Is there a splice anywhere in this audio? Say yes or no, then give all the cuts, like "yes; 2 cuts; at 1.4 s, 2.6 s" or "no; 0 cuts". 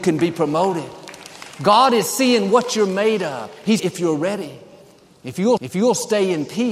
yes; 2 cuts; at 3.8 s, 5.6 s